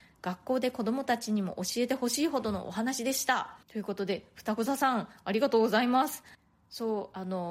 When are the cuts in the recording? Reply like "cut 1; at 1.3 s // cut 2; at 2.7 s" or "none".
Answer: cut 1; at 3.6 s